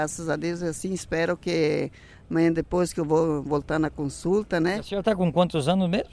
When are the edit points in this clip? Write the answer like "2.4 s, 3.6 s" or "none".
none